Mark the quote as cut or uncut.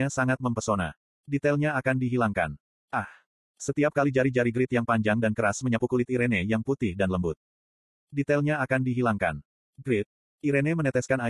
uncut